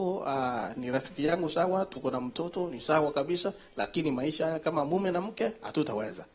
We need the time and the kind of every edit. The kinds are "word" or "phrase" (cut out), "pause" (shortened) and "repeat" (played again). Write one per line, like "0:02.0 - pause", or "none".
none